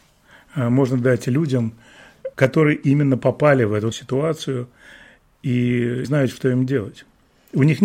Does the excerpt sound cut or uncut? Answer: cut